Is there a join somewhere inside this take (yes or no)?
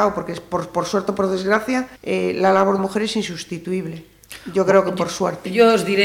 yes